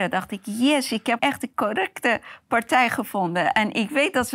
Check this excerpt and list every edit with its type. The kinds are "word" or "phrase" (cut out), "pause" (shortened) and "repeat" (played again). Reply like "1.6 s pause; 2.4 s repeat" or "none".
1.2 s word